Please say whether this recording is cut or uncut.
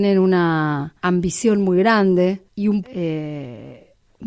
cut